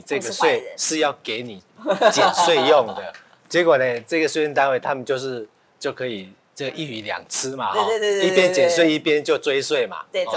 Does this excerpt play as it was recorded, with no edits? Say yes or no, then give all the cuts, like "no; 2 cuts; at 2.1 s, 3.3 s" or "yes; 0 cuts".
yes; 0 cuts